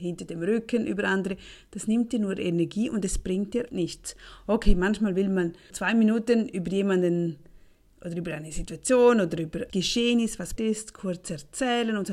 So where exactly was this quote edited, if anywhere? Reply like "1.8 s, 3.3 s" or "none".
3.7 s, 5.7 s, 9.7 s, 10.6 s